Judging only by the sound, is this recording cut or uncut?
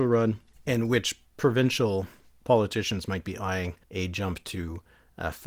cut